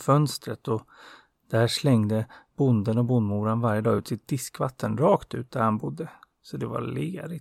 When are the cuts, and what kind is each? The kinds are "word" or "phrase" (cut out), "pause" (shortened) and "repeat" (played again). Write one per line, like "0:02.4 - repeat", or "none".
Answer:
none